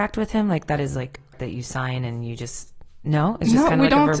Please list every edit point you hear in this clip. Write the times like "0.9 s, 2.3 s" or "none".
1.3 s